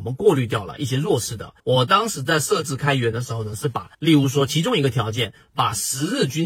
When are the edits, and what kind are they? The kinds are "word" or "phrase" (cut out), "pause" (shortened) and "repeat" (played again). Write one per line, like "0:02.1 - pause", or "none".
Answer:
0:01.6 - pause
0:03.9 - pause